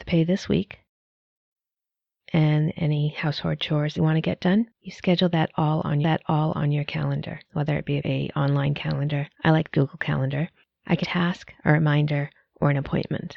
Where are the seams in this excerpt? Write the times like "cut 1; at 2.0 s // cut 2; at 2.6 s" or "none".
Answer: cut 1; at 4.0 s // cut 2; at 4.7 s // cut 3; at 6.0 s // cut 4; at 7.5 s // cut 5; at 8.0 s // cut 6; at 9.3 s // cut 7; at 9.7 s // cut 8; at 10.6 s // cut 9; at 11.0 s